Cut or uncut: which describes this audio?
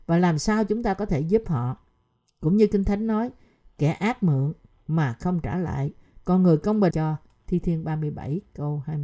cut